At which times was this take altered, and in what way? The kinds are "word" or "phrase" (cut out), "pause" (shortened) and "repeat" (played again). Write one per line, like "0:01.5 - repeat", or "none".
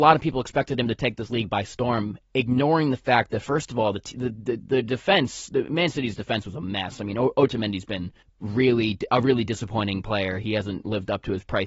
0:02.2 - pause
0:08.2 - pause

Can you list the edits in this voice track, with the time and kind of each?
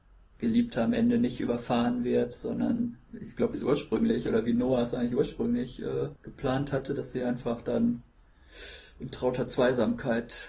0:03.1 - pause
0:03.5 - phrase
0:06.2 - pause

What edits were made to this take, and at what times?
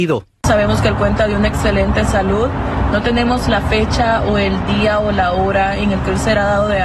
none

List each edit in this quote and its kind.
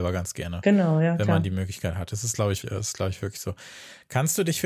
0:02.6 - word

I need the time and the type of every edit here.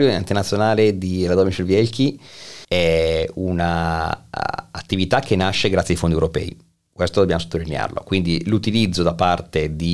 0:02.6 - pause

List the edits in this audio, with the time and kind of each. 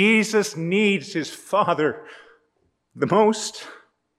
none

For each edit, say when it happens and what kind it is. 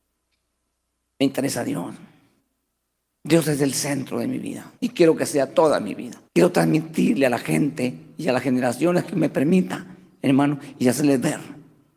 0:02.4 - pause
0:04.8 - pause
0:06.3 - pause

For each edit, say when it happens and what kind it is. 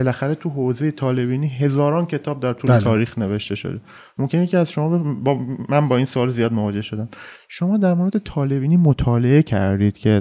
none

